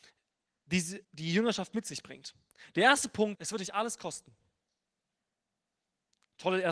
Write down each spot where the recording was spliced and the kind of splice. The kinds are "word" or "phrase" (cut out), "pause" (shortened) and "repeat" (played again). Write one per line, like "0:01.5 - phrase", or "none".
0:01.0 - pause
0:03.3 - word